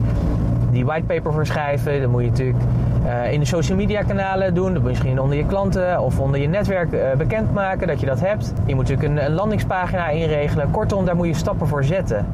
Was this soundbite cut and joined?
no; 0 cuts

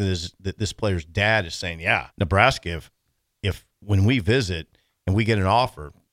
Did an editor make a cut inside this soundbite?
yes; 1 cut; at 2.1 s

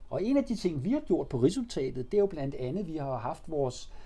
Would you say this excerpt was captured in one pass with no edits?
yes; 0 cuts

